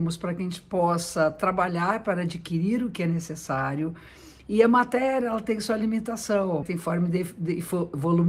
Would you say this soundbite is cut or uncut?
cut